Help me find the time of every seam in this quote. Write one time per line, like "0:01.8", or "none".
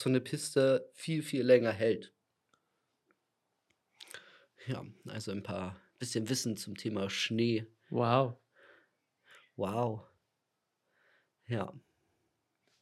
none